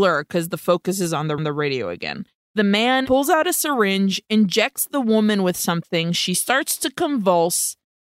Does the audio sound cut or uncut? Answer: cut